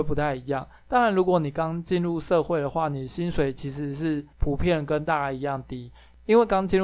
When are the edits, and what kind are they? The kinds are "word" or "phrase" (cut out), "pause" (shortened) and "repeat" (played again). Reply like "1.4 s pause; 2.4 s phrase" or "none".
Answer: 4.3 s pause

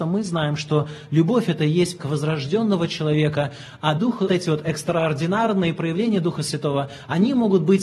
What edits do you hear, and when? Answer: 2.0 s word; 4.0 s word; 4.3 s word

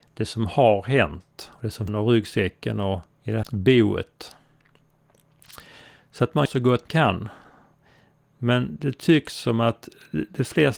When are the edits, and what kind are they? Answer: 1.9 s phrase; 3.1 s pause; 3.4 s word; 6.5 s word; 6.9 s word

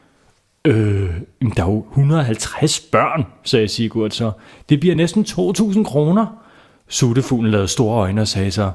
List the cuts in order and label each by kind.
none

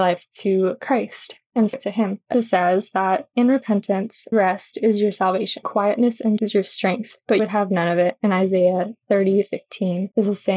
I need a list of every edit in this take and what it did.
1.7 s word; 2.3 s word; 4.3 s word; 5.6 s word; 6.4 s word; 7.4 s word

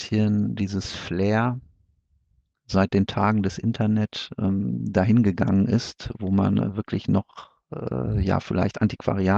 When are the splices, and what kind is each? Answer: none

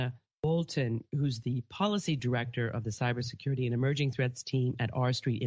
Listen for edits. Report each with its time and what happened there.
none

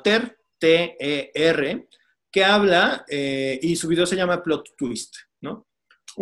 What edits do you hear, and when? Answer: none

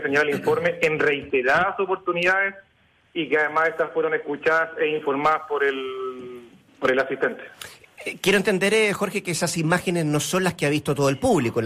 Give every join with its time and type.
none

